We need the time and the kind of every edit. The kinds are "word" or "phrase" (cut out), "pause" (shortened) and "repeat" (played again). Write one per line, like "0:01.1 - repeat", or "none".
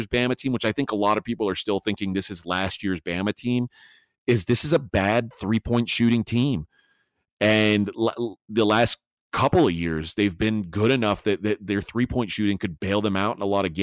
none